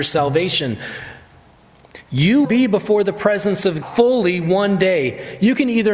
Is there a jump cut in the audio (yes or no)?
yes